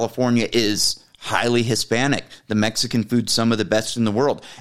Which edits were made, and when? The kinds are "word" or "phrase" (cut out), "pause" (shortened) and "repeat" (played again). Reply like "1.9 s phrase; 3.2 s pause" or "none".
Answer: none